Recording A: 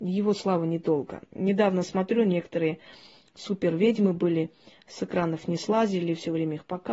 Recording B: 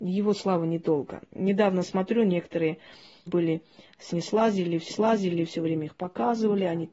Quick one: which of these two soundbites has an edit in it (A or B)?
B